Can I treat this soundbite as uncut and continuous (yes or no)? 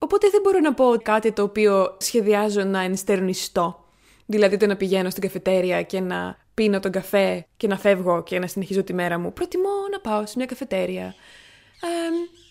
no